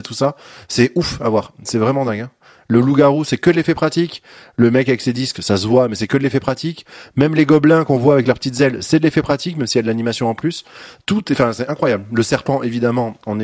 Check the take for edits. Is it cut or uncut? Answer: uncut